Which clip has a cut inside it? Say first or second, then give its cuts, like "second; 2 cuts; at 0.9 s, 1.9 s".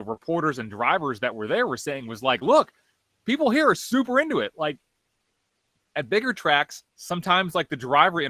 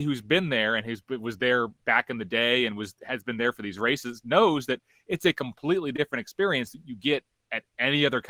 first; 1 cut; at 6.9 s